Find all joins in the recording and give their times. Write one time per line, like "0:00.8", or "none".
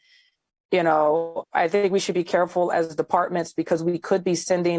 0:01.4